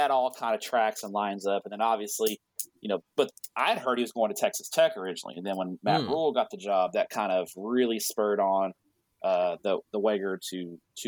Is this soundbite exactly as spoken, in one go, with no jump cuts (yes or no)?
yes